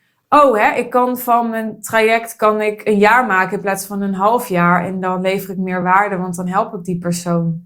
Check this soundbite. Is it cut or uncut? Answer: uncut